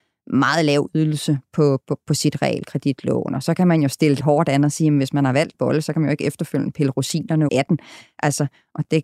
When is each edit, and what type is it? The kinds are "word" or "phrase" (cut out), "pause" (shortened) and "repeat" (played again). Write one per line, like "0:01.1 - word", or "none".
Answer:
0:01.8 - word
0:04.2 - word
0:05.5 - word
0:07.5 - word